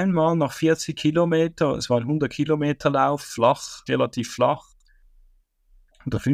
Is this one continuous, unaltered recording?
no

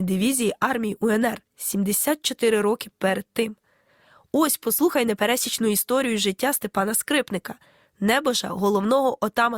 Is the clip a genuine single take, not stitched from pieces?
yes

